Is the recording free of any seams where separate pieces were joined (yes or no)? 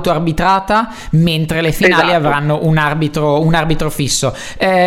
yes